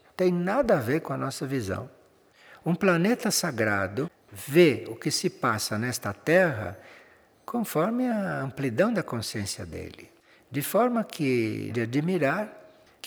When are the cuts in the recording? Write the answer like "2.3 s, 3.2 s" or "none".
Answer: 11.7 s